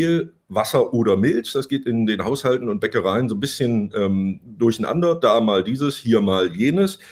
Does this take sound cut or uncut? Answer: uncut